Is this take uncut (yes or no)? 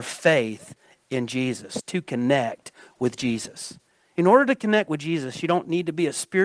yes